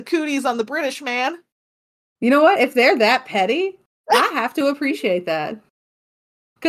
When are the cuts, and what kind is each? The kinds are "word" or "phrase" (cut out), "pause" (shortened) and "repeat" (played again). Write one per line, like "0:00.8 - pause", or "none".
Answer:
none